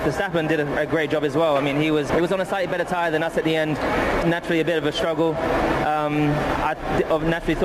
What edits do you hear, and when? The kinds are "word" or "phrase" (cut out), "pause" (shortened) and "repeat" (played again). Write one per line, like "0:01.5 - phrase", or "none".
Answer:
0:02.1 - word
0:04.2 - word